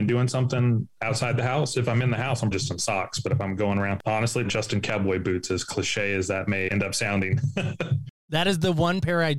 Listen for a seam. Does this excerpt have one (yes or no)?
yes